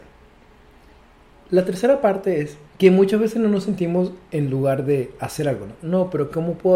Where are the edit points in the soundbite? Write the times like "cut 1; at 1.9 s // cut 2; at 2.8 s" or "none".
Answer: cut 1; at 2.7 s